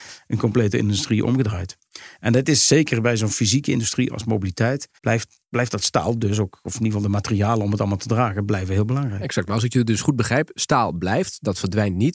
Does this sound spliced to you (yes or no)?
yes